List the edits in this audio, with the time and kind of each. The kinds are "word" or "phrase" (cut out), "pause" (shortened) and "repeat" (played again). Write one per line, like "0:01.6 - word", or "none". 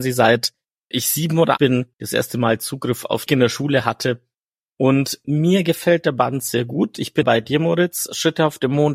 0:00.9 - word
0:01.6 - word
0:01.9 - pause
0:03.3 - phrase
0:05.2 - word
0:07.2 - word